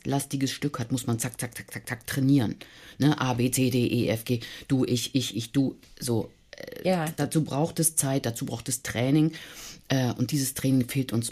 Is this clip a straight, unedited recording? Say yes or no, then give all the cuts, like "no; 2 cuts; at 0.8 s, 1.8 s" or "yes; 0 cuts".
yes; 0 cuts